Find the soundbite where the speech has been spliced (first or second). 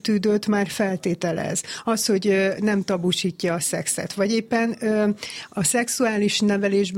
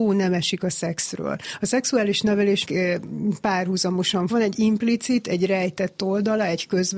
second